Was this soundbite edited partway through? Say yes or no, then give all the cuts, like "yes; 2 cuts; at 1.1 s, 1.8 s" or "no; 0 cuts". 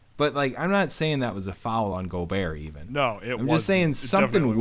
no; 0 cuts